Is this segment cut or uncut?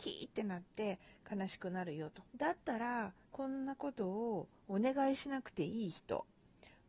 cut